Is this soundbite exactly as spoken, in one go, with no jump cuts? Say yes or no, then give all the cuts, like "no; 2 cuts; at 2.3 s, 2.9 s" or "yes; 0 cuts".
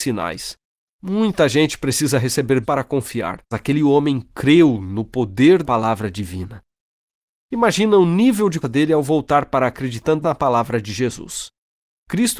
no; 6 cuts; at 2.6 s, 3.5 s, 5.6 s, 8.6 s, 9.7 s, 10.2 s